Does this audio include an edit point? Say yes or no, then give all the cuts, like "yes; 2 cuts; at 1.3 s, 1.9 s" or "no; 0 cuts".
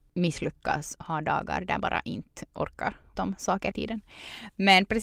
yes; 4 cuts; at 1.0 s, 1.8 s, 3.2 s, 3.7 s